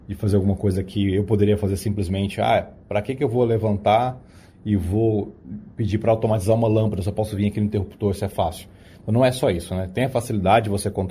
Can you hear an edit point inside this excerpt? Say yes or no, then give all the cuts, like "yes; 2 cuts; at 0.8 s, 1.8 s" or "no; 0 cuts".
no; 0 cuts